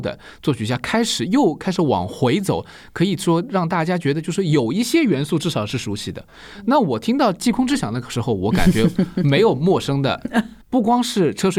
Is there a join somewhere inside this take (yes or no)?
yes